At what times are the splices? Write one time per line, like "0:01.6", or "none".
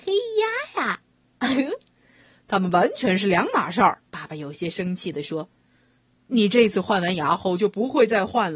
0:04.1